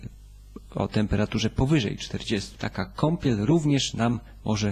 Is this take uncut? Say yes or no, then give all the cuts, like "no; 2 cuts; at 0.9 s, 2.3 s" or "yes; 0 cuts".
no; 1 cut; at 2.5 s